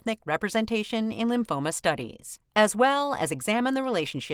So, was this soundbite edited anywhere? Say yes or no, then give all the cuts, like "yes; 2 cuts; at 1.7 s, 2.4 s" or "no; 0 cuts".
no; 0 cuts